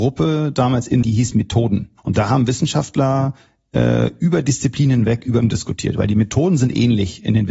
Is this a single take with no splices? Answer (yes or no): no